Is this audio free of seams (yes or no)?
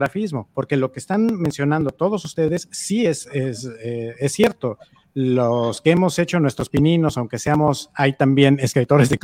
yes